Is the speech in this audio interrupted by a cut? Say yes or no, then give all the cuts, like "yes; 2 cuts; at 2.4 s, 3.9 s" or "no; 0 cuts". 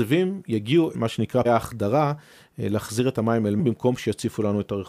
yes; 3 cuts; at 0.9 s, 1.4 s, 3.6 s